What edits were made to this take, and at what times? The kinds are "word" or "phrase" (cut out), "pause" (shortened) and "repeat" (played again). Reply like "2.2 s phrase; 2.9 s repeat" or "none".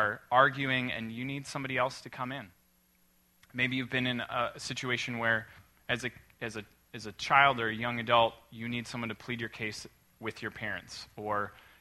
none